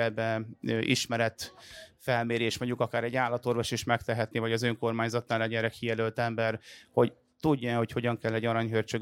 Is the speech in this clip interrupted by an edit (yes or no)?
no